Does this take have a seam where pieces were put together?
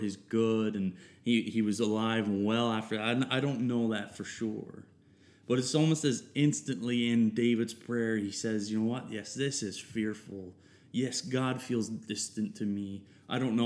no; 0 cuts

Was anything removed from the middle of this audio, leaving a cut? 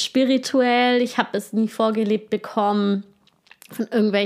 no; 0 cuts

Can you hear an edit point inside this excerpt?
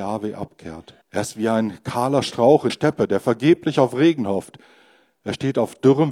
yes; 2 cuts; at 1.0 s, 2.7 s

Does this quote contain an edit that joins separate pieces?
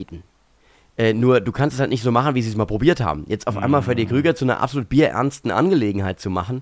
no; 0 cuts

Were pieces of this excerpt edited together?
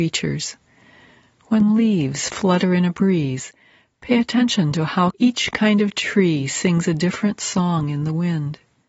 no; 0 cuts

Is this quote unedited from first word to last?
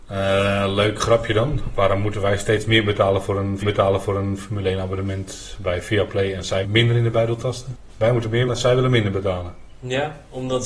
no; 3 cuts; at 3.6 s, 6.6 s, 8.5 s

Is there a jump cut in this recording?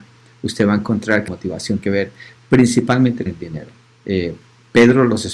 yes; 3 cuts; at 1.3 s, 1.8 s, 3.3 s

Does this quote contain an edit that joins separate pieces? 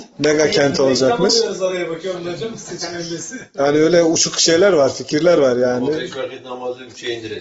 yes; 1 cut; at 3.6 s

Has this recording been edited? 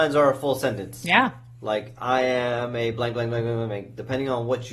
no; 0 cuts

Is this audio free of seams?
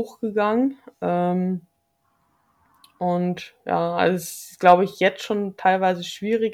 yes; 0 cuts

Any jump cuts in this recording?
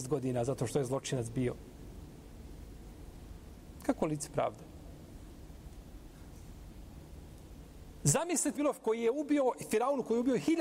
yes; 1 cut; at 8.5 s

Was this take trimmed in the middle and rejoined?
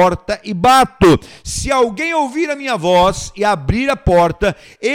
no; 0 cuts

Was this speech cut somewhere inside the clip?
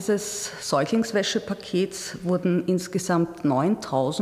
no; 0 cuts

